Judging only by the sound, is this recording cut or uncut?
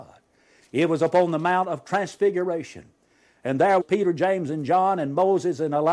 cut